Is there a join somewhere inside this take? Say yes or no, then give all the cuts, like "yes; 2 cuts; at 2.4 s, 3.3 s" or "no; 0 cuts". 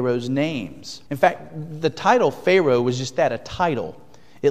yes; 1 cut; at 1.1 s